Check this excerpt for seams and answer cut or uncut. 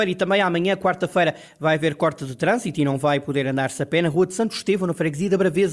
uncut